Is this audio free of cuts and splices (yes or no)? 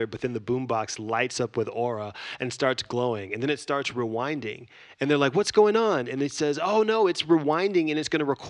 yes